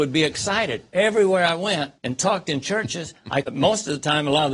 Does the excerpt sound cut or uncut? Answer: cut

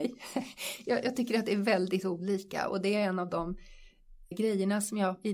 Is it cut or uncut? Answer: cut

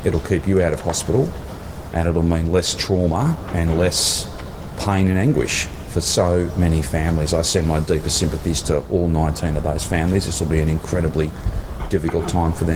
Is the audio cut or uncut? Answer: uncut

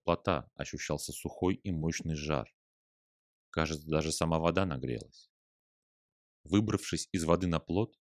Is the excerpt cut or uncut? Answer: uncut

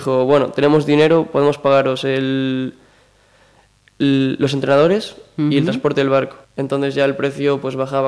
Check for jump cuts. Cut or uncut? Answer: cut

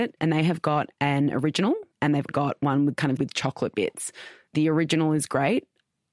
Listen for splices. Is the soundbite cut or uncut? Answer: cut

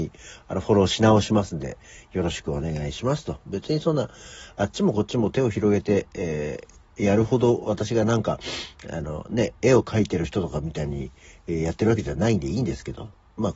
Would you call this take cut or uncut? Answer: uncut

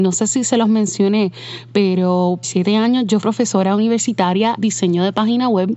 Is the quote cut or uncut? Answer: cut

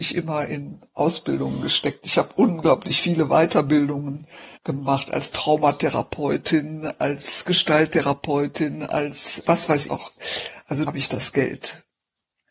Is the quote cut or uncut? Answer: cut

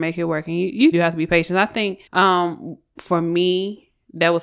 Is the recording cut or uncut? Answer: cut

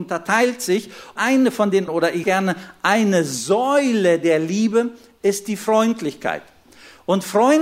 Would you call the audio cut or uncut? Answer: cut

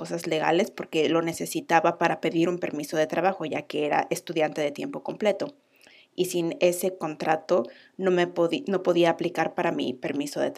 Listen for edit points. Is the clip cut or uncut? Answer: uncut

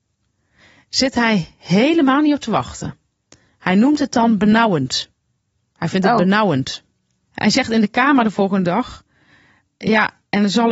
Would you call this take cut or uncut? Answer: uncut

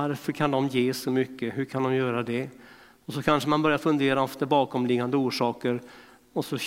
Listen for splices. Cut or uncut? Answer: uncut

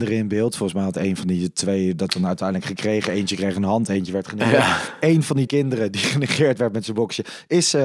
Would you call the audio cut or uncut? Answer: cut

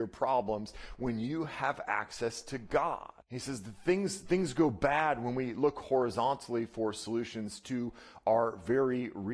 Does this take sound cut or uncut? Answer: cut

